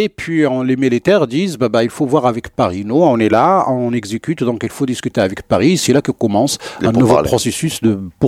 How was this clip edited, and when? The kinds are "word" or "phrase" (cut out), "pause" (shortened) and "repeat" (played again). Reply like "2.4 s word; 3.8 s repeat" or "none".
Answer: none